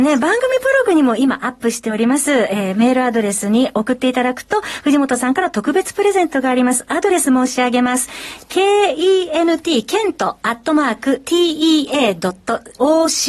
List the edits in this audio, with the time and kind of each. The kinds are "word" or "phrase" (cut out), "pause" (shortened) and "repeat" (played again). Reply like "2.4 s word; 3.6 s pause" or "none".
none